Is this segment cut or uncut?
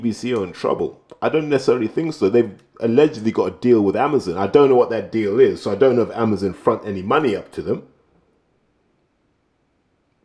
uncut